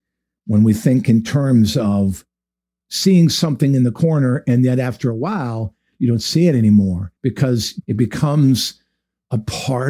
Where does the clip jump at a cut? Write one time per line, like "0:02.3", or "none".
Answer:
0:07.2